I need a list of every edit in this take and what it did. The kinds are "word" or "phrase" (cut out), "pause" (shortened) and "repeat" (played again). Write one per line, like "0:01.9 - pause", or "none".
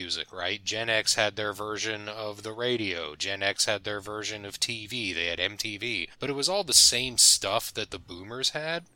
0:06.1 - pause